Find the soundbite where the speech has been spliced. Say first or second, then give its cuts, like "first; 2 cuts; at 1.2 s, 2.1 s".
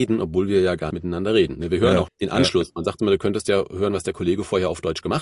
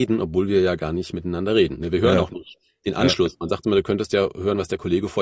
first; 2 cuts; at 0.9 s, 2.1 s